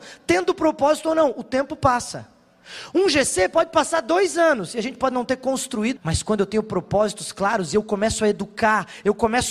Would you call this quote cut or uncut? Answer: cut